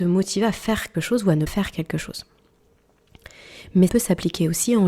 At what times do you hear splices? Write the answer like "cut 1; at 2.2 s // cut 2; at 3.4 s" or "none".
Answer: cut 1; at 0.9 s // cut 2; at 1.5 s // cut 3; at 3.9 s